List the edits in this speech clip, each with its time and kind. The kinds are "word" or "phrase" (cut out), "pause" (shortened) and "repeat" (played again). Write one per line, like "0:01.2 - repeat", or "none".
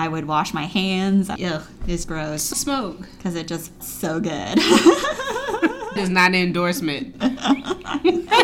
0:01.4 - word
0:02.0 - word
0:02.5 - word
0:03.8 - word
0:06.0 - word